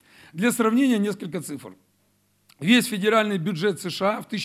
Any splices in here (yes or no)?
no